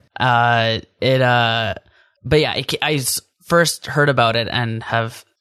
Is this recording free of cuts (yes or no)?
yes